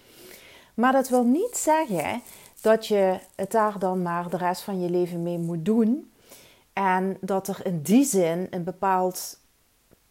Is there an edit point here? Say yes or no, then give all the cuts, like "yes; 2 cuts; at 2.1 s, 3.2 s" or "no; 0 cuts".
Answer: no; 0 cuts